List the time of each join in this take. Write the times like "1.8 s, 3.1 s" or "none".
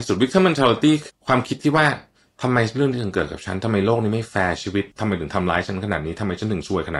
1.1 s, 4.9 s